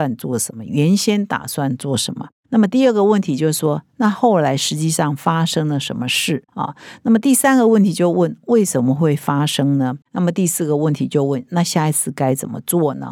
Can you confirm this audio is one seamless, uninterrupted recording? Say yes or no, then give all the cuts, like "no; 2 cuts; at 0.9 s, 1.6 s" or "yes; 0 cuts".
no; 2 cuts; at 6.5 s, 10.0 s